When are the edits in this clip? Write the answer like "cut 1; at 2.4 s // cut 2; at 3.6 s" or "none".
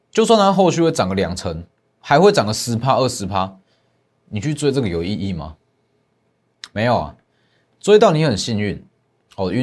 none